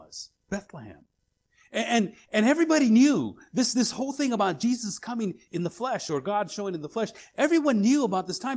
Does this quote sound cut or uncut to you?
cut